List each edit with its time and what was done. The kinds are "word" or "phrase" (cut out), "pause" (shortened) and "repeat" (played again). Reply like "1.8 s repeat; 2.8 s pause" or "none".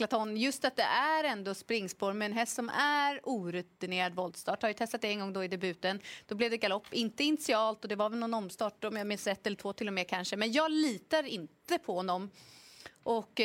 none